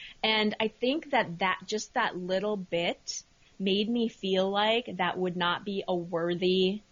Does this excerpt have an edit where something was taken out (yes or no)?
no